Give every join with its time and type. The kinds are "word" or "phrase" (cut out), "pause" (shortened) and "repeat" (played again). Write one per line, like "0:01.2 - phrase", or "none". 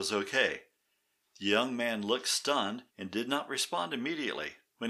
0:02.9 - pause